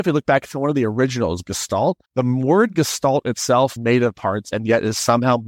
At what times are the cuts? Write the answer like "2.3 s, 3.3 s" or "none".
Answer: 2.1 s, 3.8 s, 4.1 s